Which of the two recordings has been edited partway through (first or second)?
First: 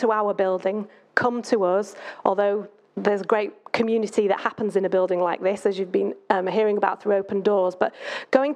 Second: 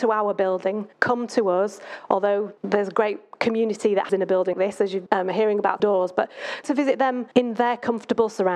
second